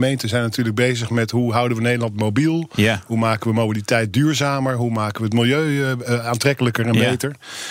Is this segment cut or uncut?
uncut